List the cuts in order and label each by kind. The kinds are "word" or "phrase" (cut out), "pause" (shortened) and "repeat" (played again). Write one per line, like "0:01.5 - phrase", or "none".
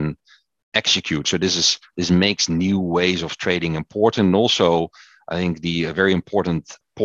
none

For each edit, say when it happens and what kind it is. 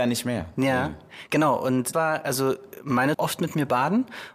0:01.9 - word
0:03.1 - phrase

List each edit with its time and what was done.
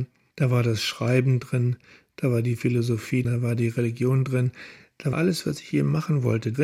0:03.2 - word
0:05.1 - word
0:05.7 - word

